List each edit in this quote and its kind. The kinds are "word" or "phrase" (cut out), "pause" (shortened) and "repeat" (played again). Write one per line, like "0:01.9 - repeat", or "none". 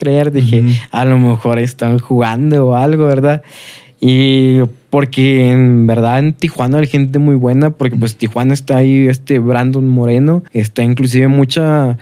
0:10.5 - pause